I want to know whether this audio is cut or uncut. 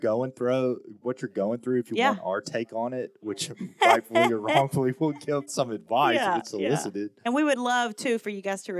uncut